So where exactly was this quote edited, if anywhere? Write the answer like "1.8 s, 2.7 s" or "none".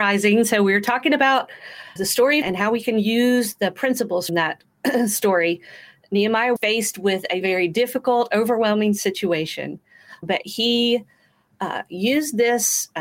2.0 s, 2.4 s, 4.3 s, 6.6 s, 7.4 s, 10.2 s